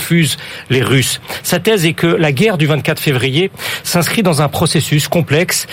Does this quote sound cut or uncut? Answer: uncut